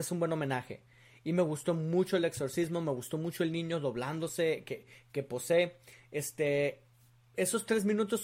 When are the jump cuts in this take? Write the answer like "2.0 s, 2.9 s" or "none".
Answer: none